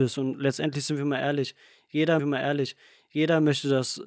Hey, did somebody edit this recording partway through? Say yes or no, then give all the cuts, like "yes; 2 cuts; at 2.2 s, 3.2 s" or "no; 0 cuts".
yes; 1 cut; at 2.2 s